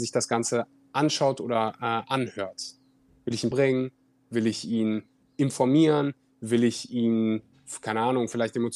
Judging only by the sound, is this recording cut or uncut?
cut